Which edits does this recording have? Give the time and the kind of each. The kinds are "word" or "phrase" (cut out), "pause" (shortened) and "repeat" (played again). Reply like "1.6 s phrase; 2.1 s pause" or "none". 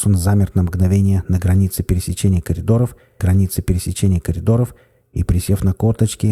3.2 s repeat